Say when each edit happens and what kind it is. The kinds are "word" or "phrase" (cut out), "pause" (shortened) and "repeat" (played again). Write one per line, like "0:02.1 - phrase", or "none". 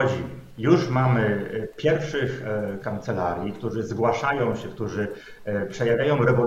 0:02.8 - word